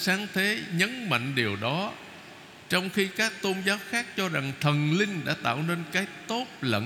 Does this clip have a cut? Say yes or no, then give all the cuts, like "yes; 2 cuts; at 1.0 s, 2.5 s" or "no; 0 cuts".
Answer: no; 0 cuts